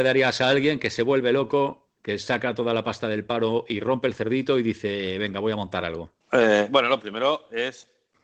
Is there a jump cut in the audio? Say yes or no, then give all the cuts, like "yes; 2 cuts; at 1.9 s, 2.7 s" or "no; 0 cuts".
no; 0 cuts